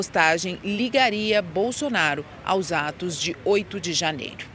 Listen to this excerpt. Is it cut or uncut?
uncut